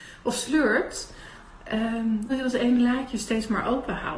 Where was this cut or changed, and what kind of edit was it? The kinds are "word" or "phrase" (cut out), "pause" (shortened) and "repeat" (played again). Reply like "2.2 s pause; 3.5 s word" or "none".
2.3 s word